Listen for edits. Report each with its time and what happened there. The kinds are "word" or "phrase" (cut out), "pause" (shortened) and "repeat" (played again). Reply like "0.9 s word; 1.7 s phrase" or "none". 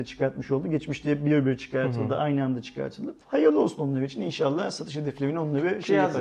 3.2 s pause